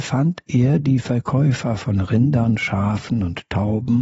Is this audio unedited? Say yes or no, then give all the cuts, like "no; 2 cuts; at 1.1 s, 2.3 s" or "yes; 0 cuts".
yes; 0 cuts